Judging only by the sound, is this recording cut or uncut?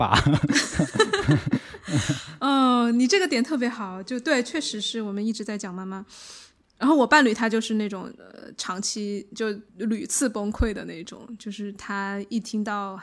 cut